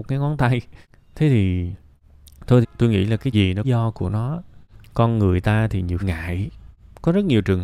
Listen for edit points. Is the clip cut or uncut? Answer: cut